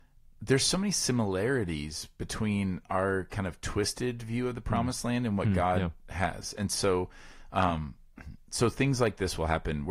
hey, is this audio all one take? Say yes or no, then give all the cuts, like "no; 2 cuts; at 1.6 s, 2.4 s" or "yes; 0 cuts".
yes; 0 cuts